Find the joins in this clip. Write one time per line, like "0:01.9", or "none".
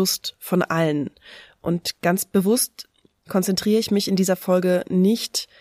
none